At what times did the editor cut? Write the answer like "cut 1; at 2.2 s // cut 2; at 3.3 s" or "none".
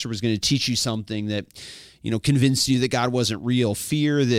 none